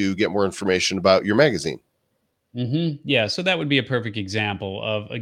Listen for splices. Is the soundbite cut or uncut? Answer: uncut